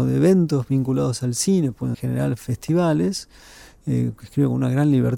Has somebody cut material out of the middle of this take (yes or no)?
yes